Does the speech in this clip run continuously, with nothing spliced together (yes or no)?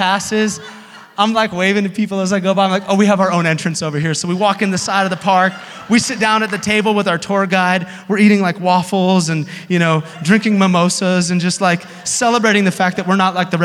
yes